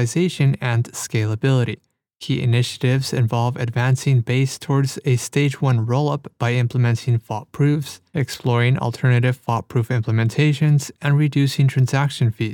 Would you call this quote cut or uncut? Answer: uncut